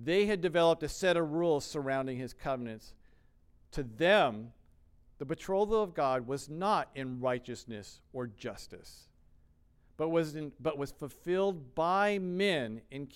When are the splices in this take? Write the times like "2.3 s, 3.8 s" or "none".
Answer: none

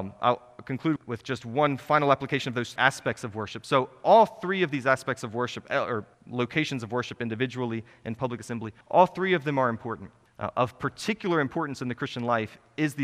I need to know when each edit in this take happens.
1.0 s, 2.8 s, 6.1 s, 8.2 s, 8.8 s, 10.3 s

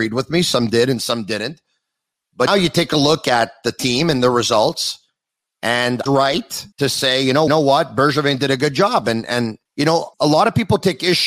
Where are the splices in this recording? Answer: 2.5 s, 6.1 s, 6.7 s, 7.5 s, 9.7 s, 10.1 s

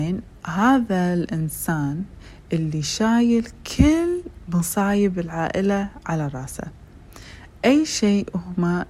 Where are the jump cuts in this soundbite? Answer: none

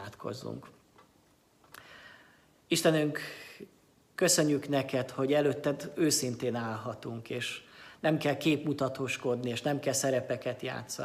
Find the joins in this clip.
none

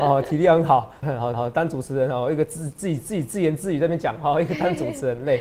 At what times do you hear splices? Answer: 1.0 s, 1.3 s

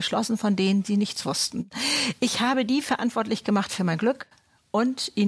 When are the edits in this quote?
none

